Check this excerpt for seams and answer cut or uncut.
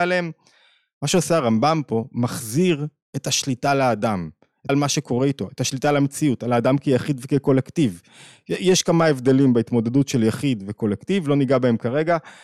cut